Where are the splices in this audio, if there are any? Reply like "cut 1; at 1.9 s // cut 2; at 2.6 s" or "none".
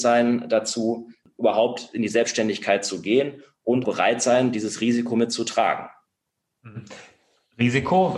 cut 1; at 3.8 s